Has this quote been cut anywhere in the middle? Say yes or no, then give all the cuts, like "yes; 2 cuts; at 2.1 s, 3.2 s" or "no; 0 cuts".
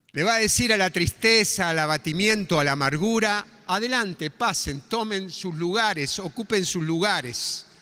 no; 0 cuts